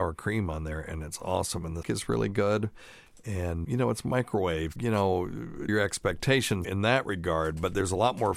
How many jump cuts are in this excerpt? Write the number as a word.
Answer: five